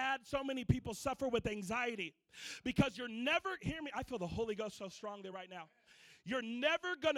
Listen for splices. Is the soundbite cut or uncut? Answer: uncut